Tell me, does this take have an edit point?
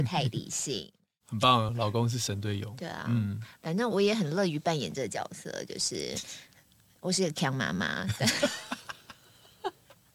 no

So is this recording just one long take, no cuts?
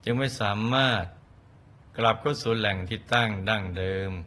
yes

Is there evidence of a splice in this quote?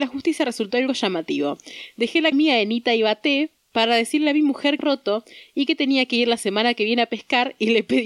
yes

